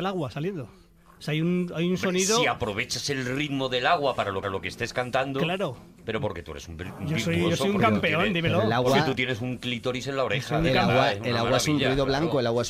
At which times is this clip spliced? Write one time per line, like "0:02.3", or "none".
0:04.4